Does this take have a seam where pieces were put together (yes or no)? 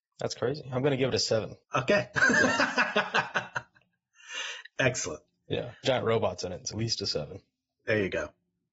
yes